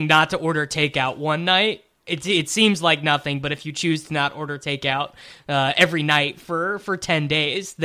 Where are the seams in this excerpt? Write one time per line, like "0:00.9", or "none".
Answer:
0:01.9